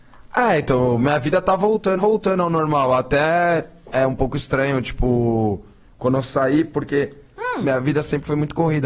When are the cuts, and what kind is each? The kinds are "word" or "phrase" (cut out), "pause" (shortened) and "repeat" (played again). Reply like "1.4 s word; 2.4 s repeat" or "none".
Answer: 2.0 s repeat